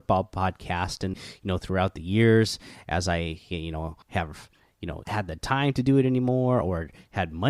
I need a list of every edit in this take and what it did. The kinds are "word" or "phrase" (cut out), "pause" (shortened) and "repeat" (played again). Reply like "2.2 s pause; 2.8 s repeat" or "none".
1.1 s word; 4.0 s pause; 5.0 s phrase